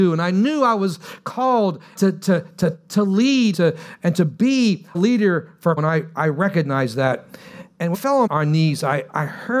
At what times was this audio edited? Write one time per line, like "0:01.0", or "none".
0:01.9
0:03.5
0:04.9
0:05.8
0:07.9
0:08.3